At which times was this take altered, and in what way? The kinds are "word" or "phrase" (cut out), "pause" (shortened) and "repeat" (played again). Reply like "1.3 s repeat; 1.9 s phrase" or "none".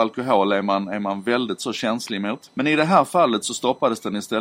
2.5 s pause